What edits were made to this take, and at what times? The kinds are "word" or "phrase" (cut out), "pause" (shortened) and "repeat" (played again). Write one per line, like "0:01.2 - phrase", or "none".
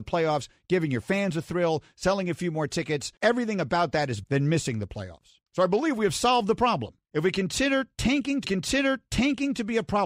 0:03.2 - pause
0:04.2 - word
0:05.5 - pause
0:07.0 - pause
0:08.4 - repeat